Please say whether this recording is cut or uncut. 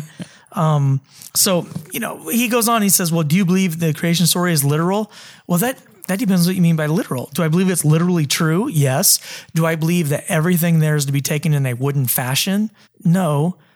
cut